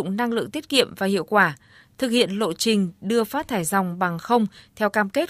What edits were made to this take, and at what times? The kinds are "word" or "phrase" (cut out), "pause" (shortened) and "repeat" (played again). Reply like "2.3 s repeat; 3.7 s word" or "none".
none